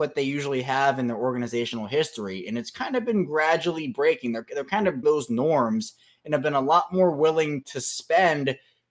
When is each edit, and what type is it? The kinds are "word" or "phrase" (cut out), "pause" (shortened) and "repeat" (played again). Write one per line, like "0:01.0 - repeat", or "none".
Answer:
0:05.0 - word